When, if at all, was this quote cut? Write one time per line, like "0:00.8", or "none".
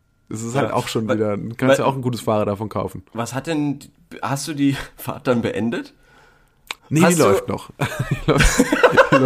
0:03.1
0:06.8